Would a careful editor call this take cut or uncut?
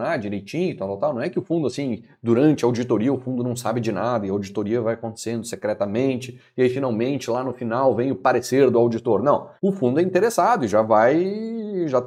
cut